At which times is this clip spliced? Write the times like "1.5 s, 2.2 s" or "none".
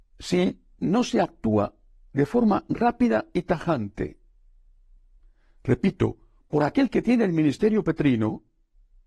none